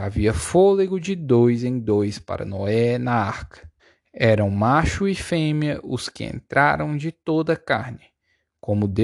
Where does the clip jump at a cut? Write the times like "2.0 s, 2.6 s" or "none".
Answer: 1.0 s, 3.8 s